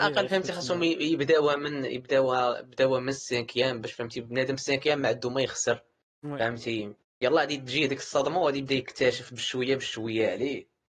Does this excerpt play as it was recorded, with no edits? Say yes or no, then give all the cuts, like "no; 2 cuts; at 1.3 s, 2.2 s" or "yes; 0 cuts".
no; 1 cut; at 7.0 s